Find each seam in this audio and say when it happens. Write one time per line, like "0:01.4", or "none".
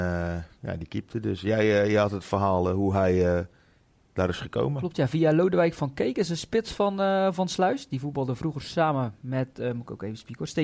none